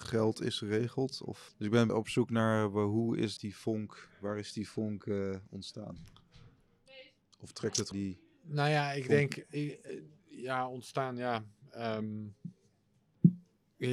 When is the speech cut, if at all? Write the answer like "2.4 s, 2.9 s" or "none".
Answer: 1.9 s, 3.4 s, 7.2 s, 7.9 s